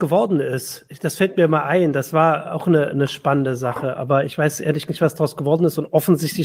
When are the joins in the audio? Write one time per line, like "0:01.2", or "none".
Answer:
0:04.9

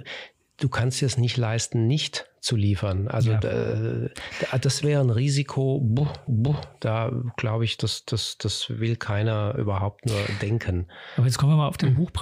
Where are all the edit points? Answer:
0:06.3
0:07.8
0:09.6

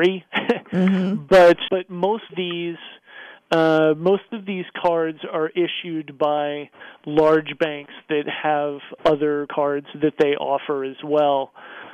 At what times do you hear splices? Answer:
0:01.7
0:02.3
0:09.5

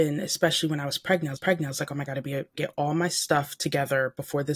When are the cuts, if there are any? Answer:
0:01.4
0:02.1
0:02.5

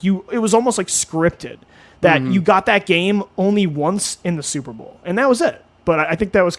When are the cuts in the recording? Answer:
none

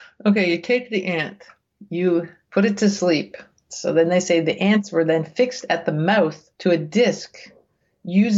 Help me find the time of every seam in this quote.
none

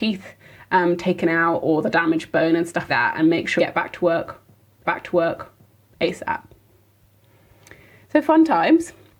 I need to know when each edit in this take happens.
0:02.9
0:03.6
0:04.8

